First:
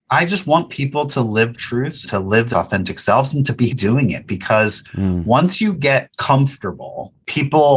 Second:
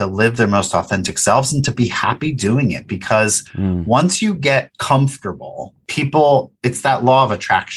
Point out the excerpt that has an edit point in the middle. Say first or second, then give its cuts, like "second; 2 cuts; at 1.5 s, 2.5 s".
first; 4 cuts; at 1.5 s, 2.0 s, 2.5 s, 3.7 s